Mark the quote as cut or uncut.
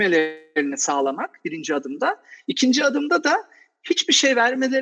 uncut